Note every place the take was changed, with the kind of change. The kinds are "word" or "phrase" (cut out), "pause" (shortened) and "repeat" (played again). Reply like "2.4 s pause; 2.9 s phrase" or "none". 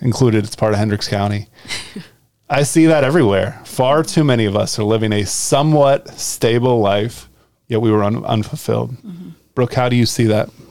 7.5 s pause; 9.0 s pause